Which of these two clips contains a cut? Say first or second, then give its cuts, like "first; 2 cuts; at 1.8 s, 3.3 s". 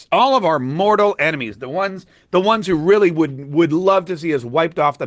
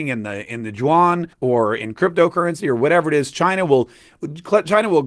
second; 1 cut; at 1.3 s